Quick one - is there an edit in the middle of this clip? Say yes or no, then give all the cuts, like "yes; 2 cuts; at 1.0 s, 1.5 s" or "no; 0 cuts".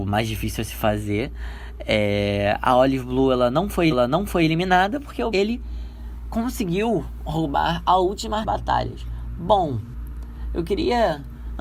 yes; 3 cuts; at 3.9 s, 5.3 s, 8.4 s